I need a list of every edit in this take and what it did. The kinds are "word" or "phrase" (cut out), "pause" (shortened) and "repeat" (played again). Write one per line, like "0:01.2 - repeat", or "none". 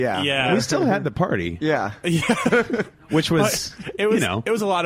none